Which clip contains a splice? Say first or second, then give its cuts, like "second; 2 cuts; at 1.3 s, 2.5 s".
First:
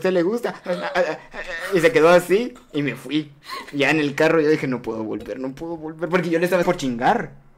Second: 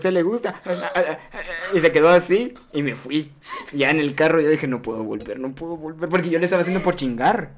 first; 1 cut; at 6.6 s